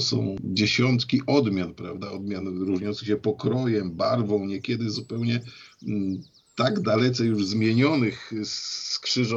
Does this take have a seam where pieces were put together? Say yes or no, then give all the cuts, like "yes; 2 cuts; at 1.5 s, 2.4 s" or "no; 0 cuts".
no; 0 cuts